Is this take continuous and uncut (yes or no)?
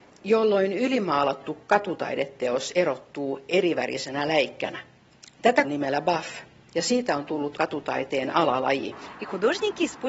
no